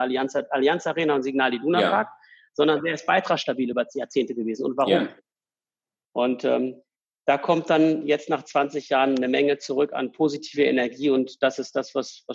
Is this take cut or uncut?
uncut